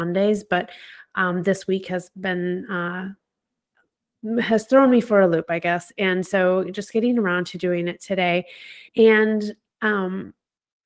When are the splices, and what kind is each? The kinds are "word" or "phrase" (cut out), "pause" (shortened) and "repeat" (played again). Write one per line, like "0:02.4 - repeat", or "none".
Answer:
0:08.9 - pause